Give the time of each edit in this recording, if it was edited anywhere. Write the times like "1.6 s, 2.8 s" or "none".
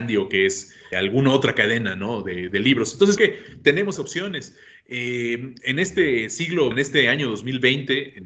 0.9 s, 3.2 s, 4.0 s, 6.7 s